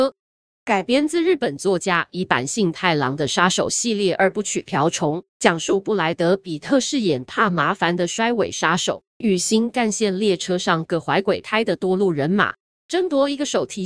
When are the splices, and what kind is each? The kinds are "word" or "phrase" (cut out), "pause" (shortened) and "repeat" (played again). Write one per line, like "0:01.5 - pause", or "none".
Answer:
0:05.3 - pause
0:09.1 - pause